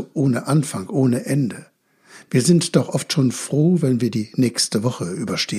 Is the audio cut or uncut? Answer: uncut